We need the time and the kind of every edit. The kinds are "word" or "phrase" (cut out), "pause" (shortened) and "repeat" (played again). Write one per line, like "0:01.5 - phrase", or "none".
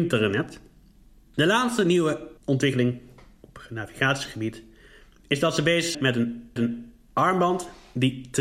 0:02.4 - pause
0:05.9 - word
0:06.6 - repeat